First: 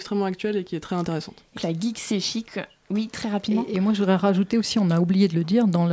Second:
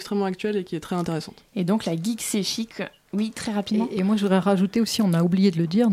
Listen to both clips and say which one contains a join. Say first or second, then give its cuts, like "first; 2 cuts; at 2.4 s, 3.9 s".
first; 1 cut; at 1.6 s